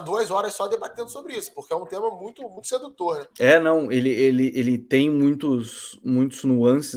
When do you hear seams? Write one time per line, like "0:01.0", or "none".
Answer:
0:03.3